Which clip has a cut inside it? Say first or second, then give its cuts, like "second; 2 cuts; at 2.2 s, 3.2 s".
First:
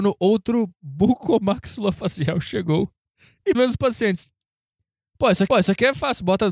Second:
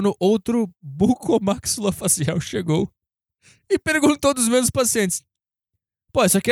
first; 3 cuts; at 3.0 s, 3.5 s, 5.5 s